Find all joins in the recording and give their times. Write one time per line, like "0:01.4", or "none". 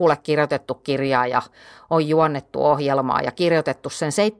none